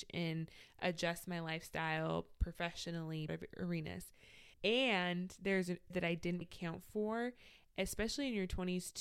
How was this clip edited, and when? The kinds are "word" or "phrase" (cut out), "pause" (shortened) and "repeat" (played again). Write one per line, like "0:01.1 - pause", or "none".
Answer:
0:03.3 - phrase
0:04.5 - pause
0:05.9 - word
0:06.4 - word